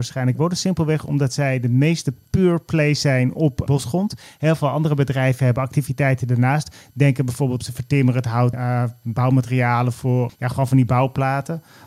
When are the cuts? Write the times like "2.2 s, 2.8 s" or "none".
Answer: 3.7 s, 7.6 s, 8.5 s, 10.3 s